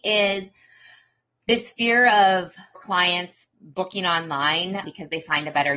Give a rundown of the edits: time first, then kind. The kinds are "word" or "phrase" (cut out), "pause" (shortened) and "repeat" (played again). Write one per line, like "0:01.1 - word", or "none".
0:02.8 - word
0:04.8 - word